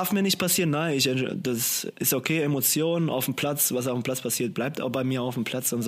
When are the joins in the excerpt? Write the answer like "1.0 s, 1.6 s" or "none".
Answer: none